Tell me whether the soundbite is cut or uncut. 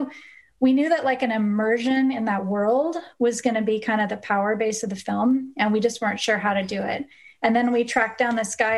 uncut